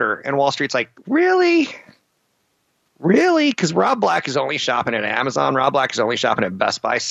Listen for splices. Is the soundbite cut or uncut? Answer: uncut